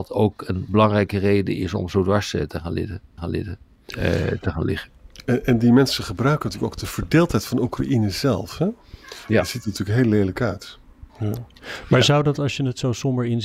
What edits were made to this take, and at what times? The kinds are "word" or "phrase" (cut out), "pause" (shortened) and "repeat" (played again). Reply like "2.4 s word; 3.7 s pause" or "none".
3.2 s repeat; 11.1 s pause